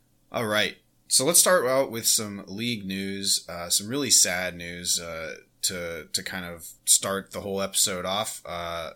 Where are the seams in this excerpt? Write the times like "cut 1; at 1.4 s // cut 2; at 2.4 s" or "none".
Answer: cut 1; at 6.8 s

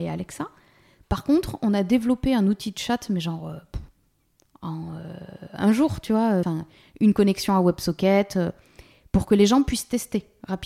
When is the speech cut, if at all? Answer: cut 1; at 6.4 s

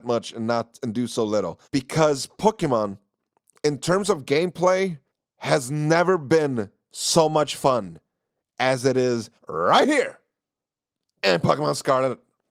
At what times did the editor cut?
cut 1; at 1.6 s // cut 2; at 5.1 s // cut 3; at 9.4 s

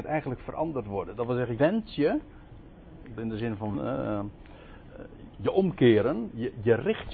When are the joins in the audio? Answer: cut 1; at 1.6 s // cut 2; at 3.2 s // cut 3; at 3.7 s // cut 4; at 5.3 s

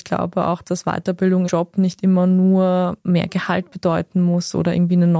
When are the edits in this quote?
cut 1; at 1.4 s

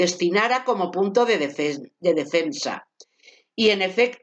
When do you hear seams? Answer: none

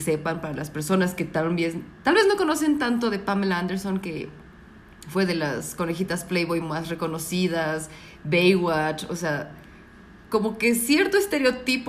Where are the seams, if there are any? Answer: none

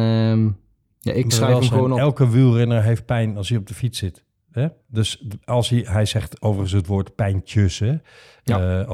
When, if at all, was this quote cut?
cut 1; at 1.3 s

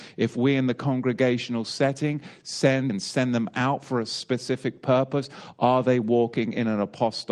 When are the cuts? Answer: cut 1; at 2.9 s

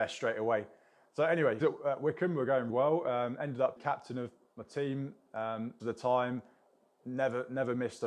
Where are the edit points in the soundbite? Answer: cut 1; at 1.6 s // cut 2; at 2.7 s // cut 3; at 3.8 s // cut 4; at 5.8 s

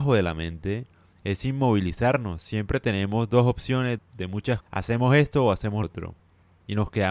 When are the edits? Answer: cut 1; at 4.0 s // cut 2; at 4.6 s // cut 3; at 5.8 s

